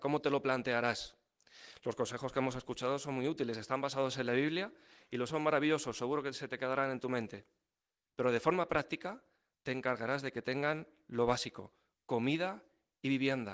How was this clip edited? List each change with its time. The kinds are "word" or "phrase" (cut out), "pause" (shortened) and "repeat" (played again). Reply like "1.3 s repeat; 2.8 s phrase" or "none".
5.3 s word